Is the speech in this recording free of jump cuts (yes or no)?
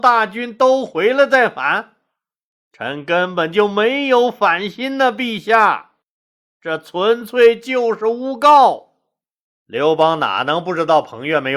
yes